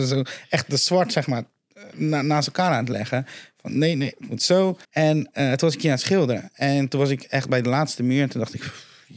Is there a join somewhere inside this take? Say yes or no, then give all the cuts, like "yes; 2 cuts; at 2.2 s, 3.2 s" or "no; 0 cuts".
yes; 1 cut; at 4.8 s